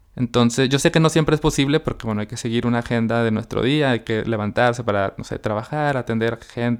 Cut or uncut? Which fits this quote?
uncut